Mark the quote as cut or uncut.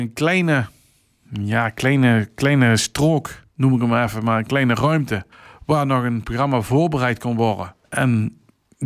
cut